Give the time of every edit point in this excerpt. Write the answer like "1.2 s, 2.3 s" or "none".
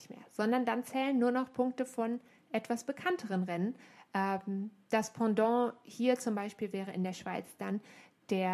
none